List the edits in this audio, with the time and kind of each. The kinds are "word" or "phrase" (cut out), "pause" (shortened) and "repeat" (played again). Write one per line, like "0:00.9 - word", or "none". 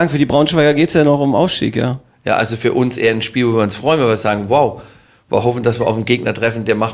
none